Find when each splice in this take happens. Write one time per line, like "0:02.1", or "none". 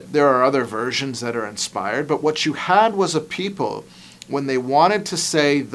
none